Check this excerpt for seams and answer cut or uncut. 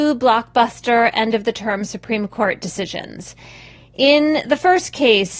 uncut